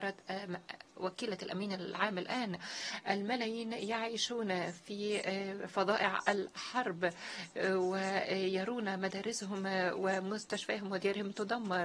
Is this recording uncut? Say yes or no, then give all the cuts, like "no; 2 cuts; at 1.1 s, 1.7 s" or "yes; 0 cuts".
yes; 0 cuts